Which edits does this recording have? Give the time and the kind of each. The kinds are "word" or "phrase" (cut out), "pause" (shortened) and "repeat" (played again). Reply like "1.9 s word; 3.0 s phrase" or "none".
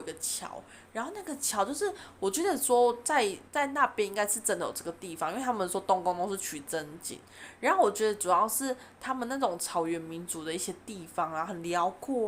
3.5 s pause